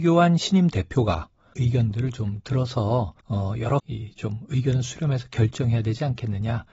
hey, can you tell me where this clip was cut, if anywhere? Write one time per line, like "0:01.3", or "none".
0:01.5
0:03.2
0:03.8